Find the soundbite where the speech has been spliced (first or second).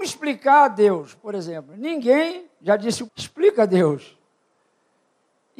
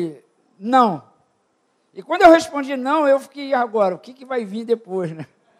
first